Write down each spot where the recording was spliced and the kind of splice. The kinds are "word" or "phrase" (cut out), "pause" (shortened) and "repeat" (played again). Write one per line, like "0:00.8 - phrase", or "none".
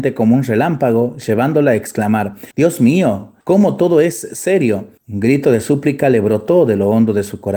0:02.5 - pause
0:03.4 - pause
0:05.0 - pause